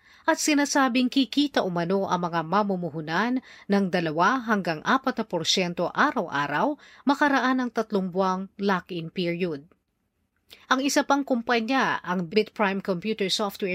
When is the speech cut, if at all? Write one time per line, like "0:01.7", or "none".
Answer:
0:10.6
0:12.3

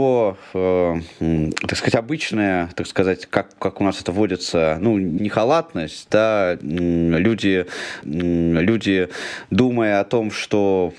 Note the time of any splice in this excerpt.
0:05.2
0:08.0

